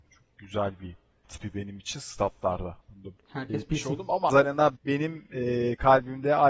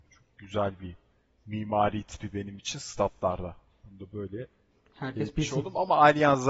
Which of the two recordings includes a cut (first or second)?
first